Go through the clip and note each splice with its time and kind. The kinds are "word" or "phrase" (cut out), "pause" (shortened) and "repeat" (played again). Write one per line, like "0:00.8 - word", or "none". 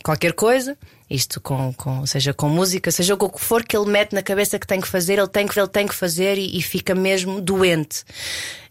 0:05.6 - repeat